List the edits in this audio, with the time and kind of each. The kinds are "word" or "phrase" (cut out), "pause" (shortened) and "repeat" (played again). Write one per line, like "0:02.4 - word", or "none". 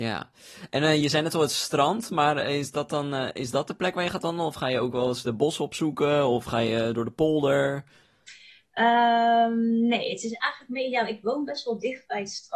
none